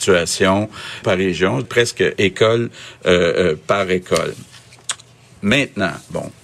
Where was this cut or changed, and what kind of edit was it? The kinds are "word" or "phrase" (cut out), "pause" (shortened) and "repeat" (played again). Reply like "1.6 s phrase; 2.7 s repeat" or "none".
1.0 s word; 1.6 s word

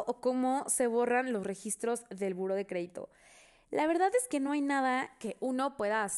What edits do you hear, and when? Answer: none

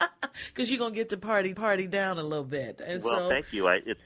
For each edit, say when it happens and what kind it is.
1.5 s repeat

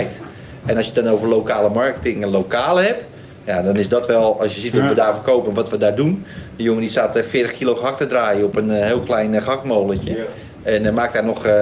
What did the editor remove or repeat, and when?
none

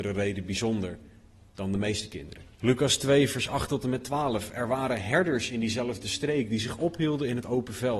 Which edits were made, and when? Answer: 2.5 s pause

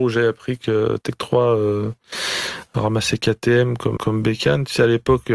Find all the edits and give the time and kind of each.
4.0 s word

